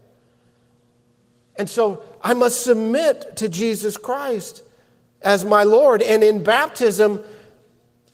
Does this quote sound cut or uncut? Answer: uncut